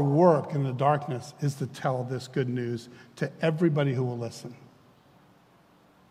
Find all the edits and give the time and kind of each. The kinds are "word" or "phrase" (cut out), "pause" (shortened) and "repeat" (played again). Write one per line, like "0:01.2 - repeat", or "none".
none